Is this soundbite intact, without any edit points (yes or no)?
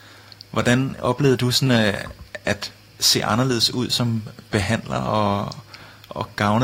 yes